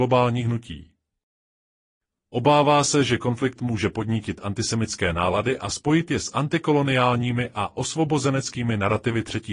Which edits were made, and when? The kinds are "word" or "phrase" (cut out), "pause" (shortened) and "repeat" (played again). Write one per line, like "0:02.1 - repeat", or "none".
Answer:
none